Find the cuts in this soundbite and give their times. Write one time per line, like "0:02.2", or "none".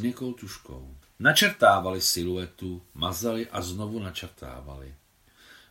0:01.0